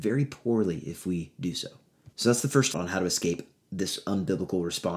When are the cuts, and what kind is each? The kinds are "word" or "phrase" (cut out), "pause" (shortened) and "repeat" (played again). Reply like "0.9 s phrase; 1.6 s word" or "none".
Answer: 2.1 s pause; 2.7 s word